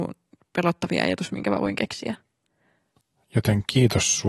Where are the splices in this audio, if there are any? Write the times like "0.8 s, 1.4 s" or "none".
none